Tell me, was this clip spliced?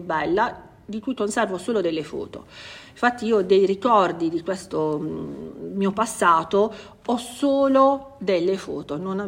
no; 0 cuts

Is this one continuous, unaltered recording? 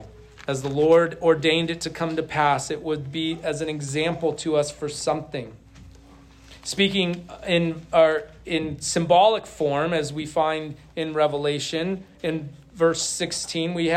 no; 1 cut; at 12.1 s

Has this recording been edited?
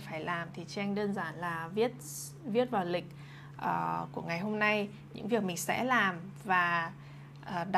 no; 0 cuts

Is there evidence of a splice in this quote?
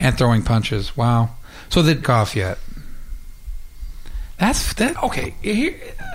yes; 2 cuts; at 2.0 s, 5.0 s

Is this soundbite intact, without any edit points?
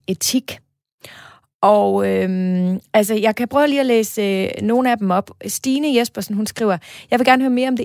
yes; 0 cuts

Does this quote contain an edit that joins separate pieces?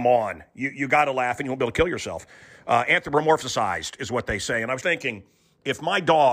yes; 1 cut; at 4.8 s

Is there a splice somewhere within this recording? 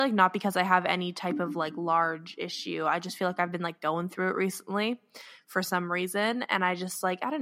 no; 0 cuts

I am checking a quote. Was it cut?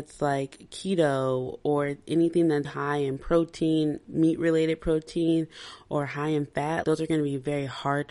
yes; 2 cuts; at 2.6 s, 6.8 s

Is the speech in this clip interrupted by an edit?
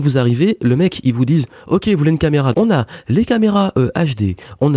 yes; 1 cut; at 2.5 s

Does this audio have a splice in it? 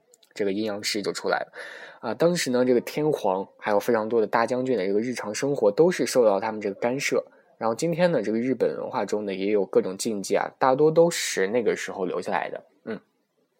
no; 0 cuts

